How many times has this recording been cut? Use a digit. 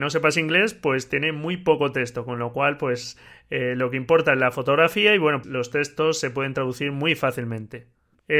1